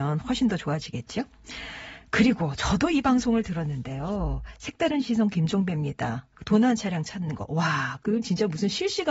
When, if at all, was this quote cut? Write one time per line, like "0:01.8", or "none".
none